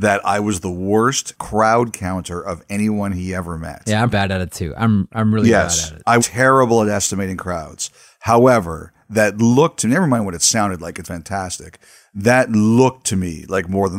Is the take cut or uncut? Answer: cut